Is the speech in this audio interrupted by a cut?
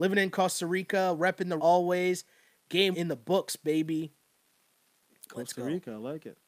yes; 2 cuts; at 1.6 s, 2.9 s

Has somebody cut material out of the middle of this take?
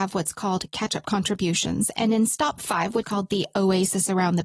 yes; 1 cut; at 3.0 s

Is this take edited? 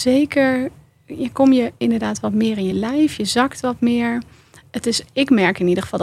no; 0 cuts

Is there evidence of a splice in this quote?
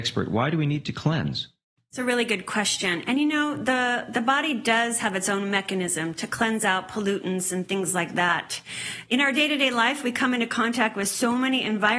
no; 0 cuts

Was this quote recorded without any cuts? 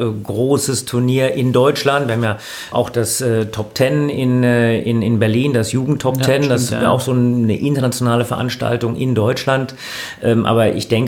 no; 1 cut; at 2.7 s

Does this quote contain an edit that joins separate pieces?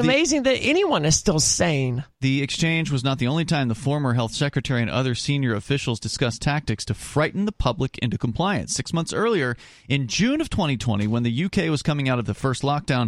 no; 0 cuts

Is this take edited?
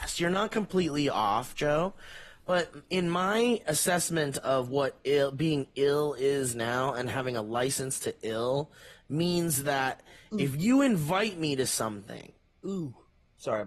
no; 0 cuts

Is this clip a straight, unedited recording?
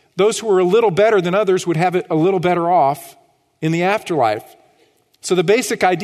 yes; 0 cuts

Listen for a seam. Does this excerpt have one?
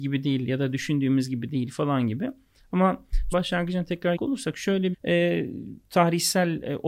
yes; 3 cuts; at 3.3 s, 4.2 s, 4.9 s

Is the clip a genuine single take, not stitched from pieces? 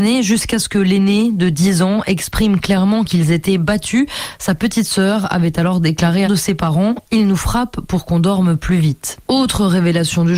no; 1 cut; at 6.2 s

